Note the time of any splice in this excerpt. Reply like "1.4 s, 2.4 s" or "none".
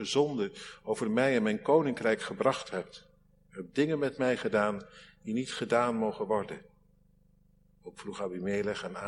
none